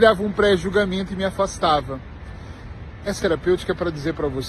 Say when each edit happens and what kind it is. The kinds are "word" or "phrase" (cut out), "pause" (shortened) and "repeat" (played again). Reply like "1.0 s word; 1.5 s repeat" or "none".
3.2 s word